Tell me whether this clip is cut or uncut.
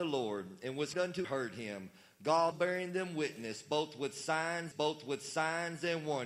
cut